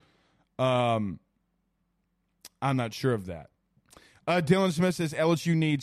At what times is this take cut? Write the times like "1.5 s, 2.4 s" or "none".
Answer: none